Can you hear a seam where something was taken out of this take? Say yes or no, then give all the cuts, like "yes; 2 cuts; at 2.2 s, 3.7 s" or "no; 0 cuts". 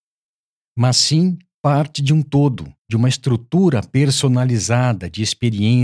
yes; 1 cut; at 2.8 s